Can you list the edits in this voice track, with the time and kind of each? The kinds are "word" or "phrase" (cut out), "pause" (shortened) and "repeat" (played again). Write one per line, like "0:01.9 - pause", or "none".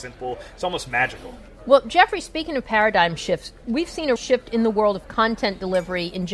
0:04.2 - word